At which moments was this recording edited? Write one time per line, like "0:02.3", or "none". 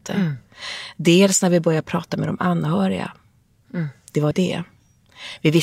0:04.3

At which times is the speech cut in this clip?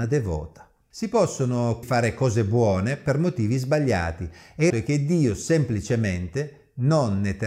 0:01.8
0:04.7

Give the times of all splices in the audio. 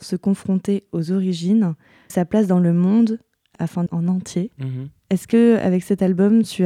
0:02.1
0:03.5
0:03.9

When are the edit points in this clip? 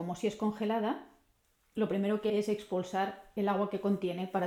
0:02.3

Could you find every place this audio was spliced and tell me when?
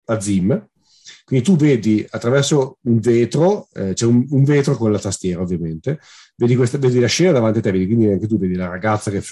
none

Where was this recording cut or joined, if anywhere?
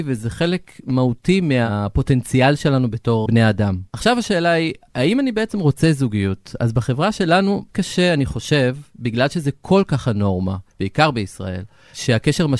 0:03.3
0:03.9
0:07.7
0:10.7

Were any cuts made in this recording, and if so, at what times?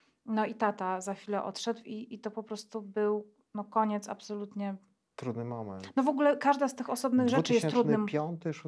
none

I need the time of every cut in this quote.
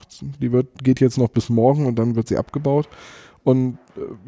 none

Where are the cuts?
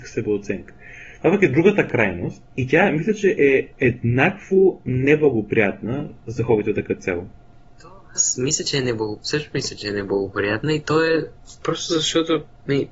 0:02.5
0:03.7

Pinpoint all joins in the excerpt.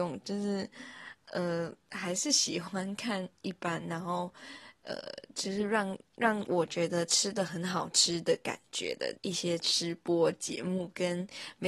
0:09.2

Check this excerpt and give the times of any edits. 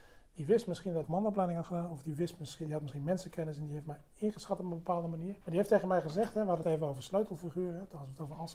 0:01.0
0:05.4
0:06.6

